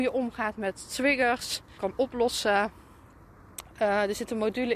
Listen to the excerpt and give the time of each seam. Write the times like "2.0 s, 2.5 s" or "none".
1.8 s